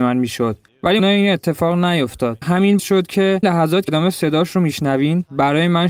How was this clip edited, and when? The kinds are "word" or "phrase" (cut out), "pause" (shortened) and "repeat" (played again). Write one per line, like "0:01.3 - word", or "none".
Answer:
0:01.0 - word
0:02.4 - word
0:02.8 - word
0:03.4 - word
0:03.9 - word

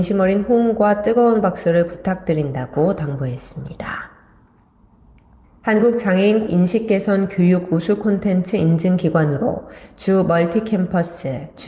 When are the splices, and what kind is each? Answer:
0:01.9 - word
0:06.5 - phrase

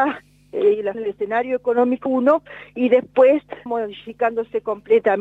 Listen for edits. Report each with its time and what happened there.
0:00.9 - word
0:02.1 - word
0:03.7 - word

